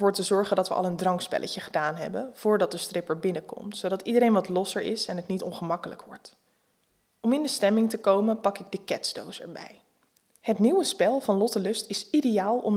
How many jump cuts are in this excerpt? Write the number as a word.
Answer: zero